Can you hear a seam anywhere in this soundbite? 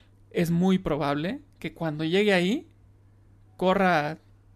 no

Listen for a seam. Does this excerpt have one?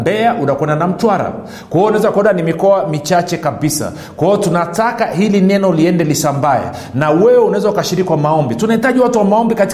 no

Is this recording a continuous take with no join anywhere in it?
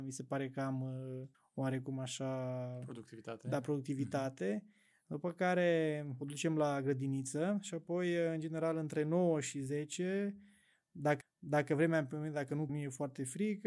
no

